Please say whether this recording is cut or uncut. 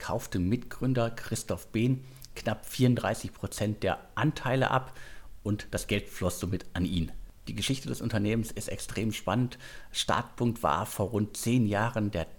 uncut